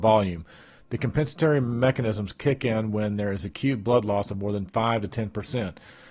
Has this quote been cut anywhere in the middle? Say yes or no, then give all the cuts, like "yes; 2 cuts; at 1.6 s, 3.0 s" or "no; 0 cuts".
no; 0 cuts